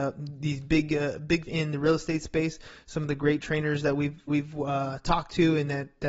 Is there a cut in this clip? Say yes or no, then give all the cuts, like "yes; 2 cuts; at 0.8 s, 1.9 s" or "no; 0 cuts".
yes; 2 cuts; at 1.5 s, 4.3 s